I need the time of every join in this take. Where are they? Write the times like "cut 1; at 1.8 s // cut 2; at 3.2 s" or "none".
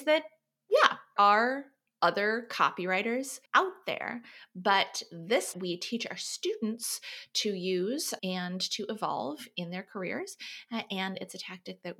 cut 1; at 1.2 s // cut 2; at 3.5 s // cut 3; at 5.5 s // cut 4; at 8.2 s